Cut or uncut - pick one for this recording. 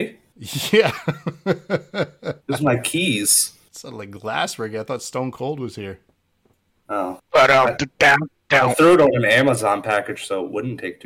cut